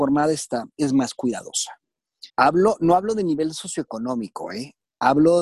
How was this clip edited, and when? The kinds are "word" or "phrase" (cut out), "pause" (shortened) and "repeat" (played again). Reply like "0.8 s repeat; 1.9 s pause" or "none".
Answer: 2.3 s pause